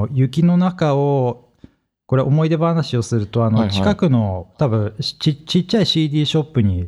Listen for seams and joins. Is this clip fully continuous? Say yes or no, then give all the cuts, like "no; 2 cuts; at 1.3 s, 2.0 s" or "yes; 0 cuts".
yes; 0 cuts